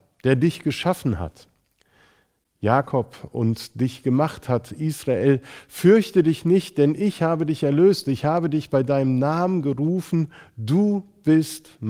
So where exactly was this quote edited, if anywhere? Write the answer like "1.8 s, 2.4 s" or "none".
none